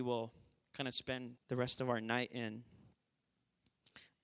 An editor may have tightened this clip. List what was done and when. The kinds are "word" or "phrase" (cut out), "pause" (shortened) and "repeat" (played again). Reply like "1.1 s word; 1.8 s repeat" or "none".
1.4 s pause